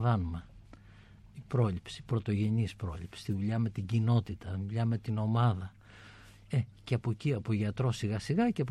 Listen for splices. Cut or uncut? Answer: uncut